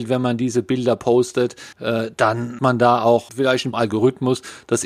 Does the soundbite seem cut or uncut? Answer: cut